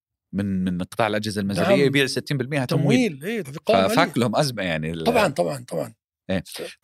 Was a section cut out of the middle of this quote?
yes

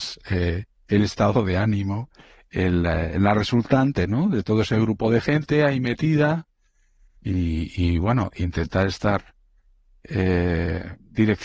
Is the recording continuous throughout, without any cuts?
yes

